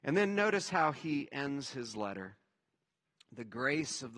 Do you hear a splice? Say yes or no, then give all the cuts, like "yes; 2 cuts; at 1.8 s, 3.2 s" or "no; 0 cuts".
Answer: no; 0 cuts